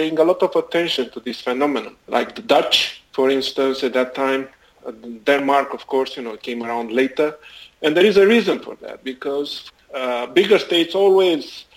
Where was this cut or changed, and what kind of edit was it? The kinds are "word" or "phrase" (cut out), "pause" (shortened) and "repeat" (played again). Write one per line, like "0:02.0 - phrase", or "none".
0:03.1 - pause